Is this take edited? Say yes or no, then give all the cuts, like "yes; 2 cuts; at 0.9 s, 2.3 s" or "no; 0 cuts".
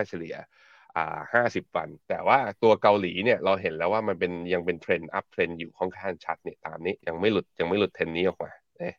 yes; 2 cuts; at 2.0 s, 7.0 s